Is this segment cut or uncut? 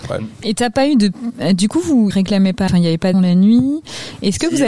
cut